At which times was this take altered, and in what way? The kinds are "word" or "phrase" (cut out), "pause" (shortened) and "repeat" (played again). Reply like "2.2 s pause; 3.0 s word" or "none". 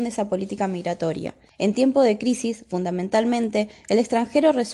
1.5 s pause